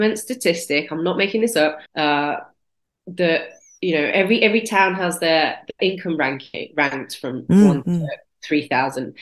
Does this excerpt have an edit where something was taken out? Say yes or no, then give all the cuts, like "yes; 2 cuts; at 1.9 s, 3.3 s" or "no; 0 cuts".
yes; 2 cuts; at 1.9 s, 5.8 s